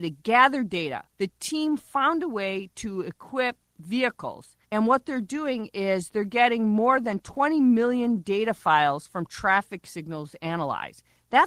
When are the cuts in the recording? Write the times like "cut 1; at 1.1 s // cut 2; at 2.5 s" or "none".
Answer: cut 1; at 1.1 s // cut 2; at 4.6 s